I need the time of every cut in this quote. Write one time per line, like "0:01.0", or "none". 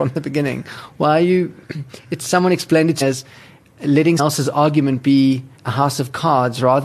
0:03.0
0:04.2
0:05.6